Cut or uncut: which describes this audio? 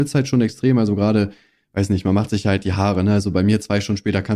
uncut